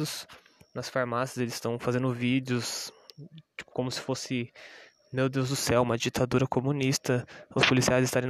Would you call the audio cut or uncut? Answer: uncut